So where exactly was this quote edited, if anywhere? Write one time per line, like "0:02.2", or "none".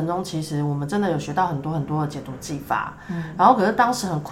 none